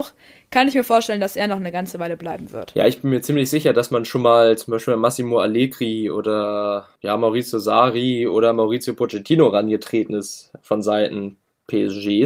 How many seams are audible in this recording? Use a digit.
1